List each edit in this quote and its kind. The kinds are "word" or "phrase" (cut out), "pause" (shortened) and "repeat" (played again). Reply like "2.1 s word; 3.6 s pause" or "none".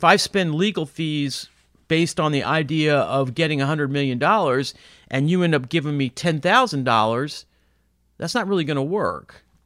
none